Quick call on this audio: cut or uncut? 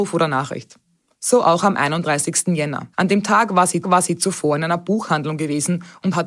cut